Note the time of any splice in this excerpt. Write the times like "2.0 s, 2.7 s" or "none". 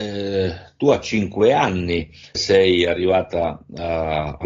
2.3 s